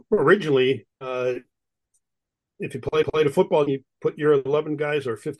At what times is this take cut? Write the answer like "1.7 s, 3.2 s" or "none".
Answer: 0.9 s, 3.0 s, 3.7 s